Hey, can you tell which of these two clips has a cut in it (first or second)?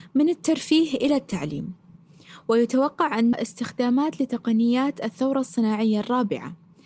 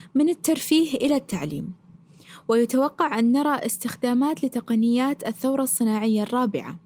first